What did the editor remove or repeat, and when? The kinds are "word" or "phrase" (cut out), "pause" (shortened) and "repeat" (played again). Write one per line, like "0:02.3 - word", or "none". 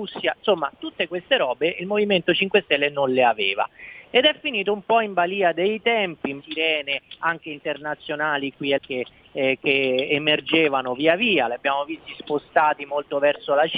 0:06.4 - phrase
0:08.8 - word